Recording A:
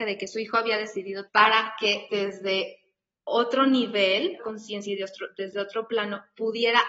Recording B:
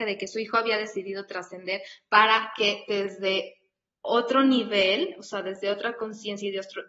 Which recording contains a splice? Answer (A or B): A